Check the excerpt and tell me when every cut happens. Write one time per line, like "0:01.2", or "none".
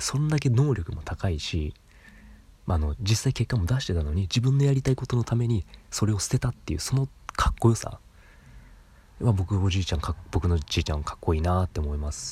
0:02.5